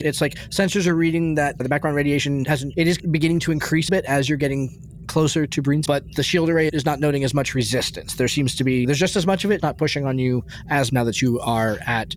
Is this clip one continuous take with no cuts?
no; 6 cuts; at 2.7 s, 3.9 s, 5.9 s, 8.8 s, 9.6 s, 10.9 s

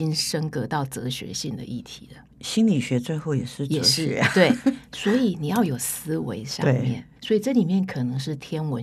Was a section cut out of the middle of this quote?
yes; 2 cuts; at 2.3 s, 7.2 s

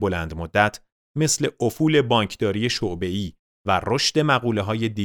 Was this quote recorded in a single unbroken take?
yes; 0 cuts

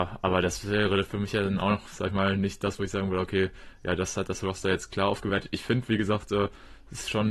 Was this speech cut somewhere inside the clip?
no; 0 cuts

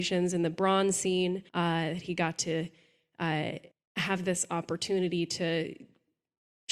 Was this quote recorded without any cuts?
no; 2 cuts; at 1.5 s, 3.7 s

